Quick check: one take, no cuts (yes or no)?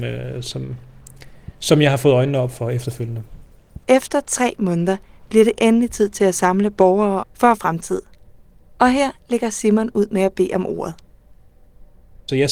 no